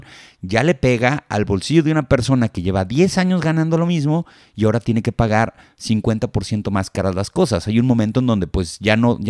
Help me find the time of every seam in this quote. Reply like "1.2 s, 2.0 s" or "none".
none